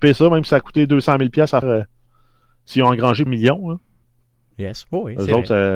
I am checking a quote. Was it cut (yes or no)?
yes